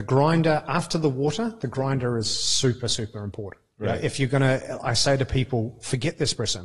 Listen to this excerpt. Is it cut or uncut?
uncut